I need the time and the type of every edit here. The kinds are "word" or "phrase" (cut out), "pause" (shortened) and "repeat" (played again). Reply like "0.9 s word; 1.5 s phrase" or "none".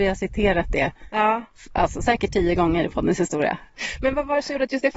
none